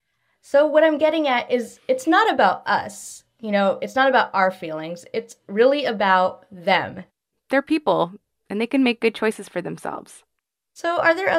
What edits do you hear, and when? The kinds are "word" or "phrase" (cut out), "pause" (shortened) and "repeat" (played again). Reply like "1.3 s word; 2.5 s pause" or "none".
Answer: none